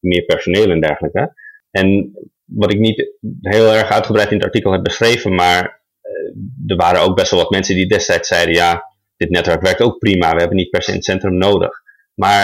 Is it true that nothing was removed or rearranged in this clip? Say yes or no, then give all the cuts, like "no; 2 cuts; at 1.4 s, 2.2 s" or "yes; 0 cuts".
yes; 0 cuts